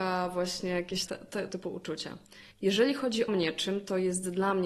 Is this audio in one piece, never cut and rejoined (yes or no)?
no